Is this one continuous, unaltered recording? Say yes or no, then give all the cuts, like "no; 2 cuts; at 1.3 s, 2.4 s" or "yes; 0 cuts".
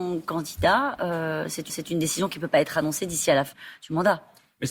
no; 2 cuts; at 1.7 s, 3.5 s